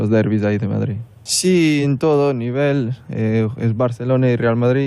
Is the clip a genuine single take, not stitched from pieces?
yes; 0 cuts

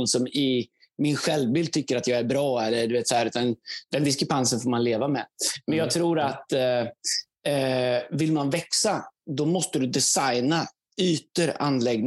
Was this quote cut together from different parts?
no; 0 cuts

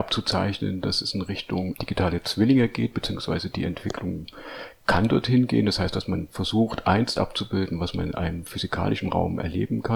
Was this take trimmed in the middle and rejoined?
yes; 2 cuts; at 1.7 s, 7.2 s

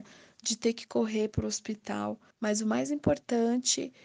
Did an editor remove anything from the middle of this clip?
yes; 1 cut; at 2.3 s

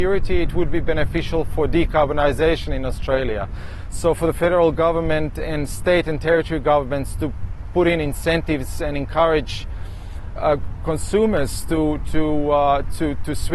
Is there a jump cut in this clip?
yes; 2 cuts; at 7.6 s, 10.4 s

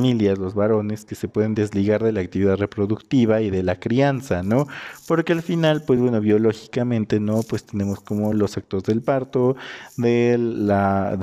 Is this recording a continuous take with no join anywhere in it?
yes; 0 cuts

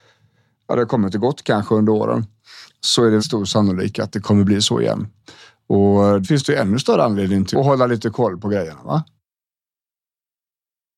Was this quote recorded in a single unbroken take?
no; 3 cuts; at 3.2 s, 6.2 s, 7.5 s

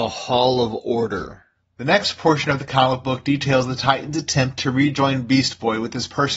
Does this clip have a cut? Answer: no; 0 cuts

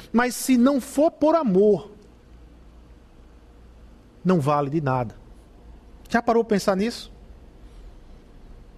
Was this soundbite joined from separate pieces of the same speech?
no; 0 cuts

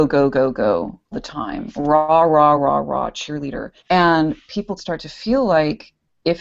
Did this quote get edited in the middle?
yes; 4 cuts; at 1.1 s, 2.6 s, 3.8 s, 4.8 s

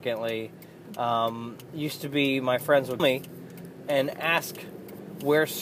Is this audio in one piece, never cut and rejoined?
no; 1 cut; at 3.0 s

